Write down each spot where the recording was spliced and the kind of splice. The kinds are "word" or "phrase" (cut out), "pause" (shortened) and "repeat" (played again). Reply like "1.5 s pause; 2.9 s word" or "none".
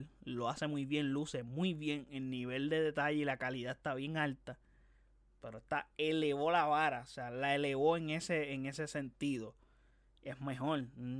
none